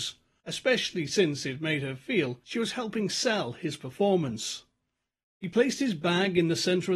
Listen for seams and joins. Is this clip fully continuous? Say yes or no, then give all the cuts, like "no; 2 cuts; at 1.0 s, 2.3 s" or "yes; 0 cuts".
yes; 0 cuts